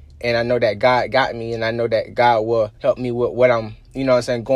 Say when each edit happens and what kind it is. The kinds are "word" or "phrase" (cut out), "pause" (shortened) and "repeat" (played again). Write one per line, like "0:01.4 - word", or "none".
0:02.8 - pause